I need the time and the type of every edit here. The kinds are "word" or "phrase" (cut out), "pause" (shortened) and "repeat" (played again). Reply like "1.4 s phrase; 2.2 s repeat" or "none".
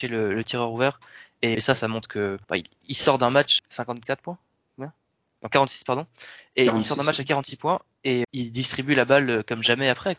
1.5 s word; 2.4 s pause; 2.7 s pause; 3.6 s word; 8.2 s word